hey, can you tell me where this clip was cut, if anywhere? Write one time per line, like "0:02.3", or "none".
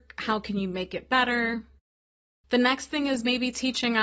none